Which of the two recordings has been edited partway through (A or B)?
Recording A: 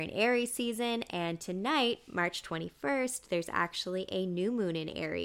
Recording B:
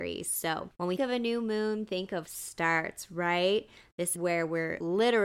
B